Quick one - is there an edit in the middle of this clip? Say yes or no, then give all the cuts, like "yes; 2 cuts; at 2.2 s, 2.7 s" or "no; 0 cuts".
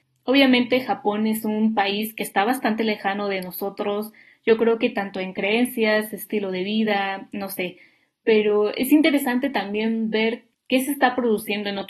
no; 0 cuts